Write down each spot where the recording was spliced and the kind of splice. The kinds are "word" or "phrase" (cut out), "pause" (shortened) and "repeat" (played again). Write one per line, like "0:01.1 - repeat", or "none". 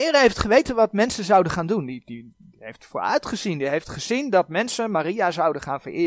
none